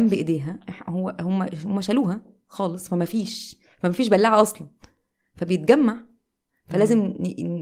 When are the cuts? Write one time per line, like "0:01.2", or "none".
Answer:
none